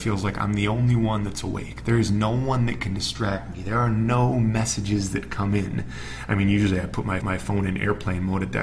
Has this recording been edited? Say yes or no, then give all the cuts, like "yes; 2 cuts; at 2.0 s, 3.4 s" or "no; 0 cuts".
yes; 1 cut; at 7.2 s